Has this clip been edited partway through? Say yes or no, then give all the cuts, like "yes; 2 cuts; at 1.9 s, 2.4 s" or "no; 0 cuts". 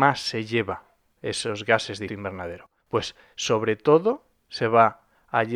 yes; 2 cuts; at 2.1 s, 2.8 s